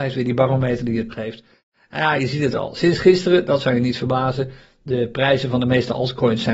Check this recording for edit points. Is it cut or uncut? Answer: cut